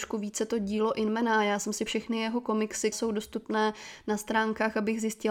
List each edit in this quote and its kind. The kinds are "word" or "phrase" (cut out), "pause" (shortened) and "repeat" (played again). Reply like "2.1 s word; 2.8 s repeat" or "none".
1.9 s phrase; 2.9 s word

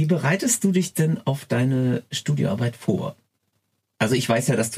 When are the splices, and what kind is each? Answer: none

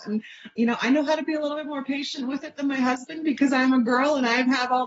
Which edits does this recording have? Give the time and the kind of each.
none

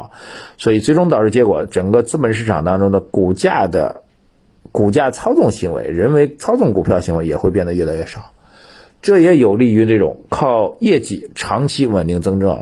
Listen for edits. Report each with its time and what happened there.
none

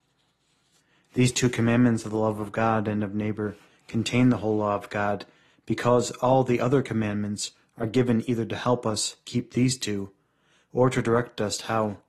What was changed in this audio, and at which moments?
9.2 s word

